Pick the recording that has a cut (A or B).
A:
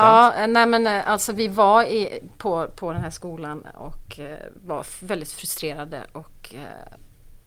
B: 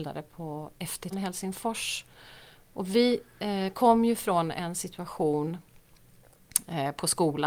B